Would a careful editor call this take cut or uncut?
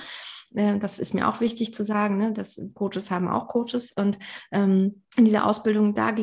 cut